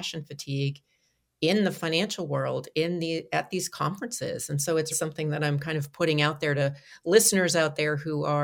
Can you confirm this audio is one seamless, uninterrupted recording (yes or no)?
no